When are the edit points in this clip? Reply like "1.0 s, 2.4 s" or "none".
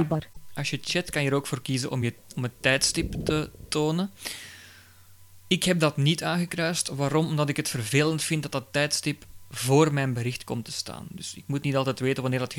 none